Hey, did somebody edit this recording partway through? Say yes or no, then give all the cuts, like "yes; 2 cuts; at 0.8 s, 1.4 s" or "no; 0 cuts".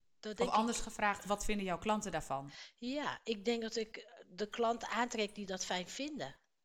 no; 0 cuts